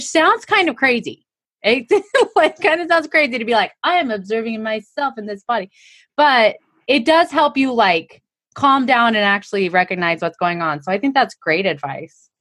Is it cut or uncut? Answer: uncut